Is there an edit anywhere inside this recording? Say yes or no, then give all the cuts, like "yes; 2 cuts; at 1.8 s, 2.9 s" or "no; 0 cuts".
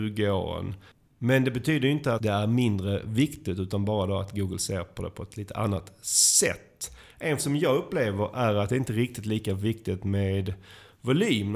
yes; 2 cuts; at 2.2 s, 7.4 s